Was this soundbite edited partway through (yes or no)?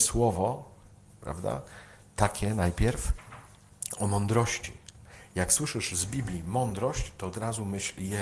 no